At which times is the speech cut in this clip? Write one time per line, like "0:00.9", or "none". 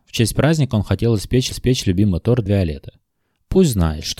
0:01.5
0:02.5